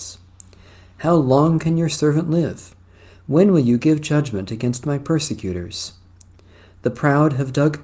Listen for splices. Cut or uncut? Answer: uncut